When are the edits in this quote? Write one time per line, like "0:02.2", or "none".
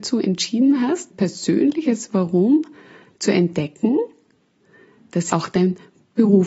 0:01.1
0:05.3